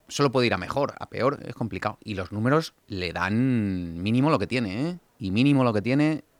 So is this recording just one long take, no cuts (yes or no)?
no